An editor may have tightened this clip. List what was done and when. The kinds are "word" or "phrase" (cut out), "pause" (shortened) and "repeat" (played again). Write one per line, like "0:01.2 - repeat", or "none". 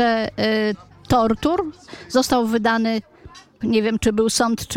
0:03.6 - word